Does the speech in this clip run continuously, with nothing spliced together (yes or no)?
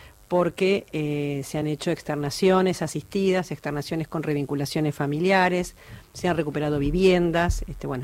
yes